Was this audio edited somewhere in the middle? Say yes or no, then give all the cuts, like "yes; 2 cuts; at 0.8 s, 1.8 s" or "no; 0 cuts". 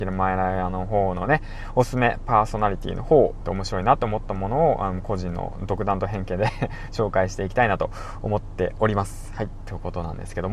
yes; 1 cut; at 3.4 s